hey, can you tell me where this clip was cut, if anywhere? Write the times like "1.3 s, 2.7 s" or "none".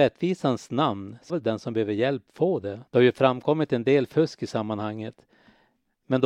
1.3 s, 2.9 s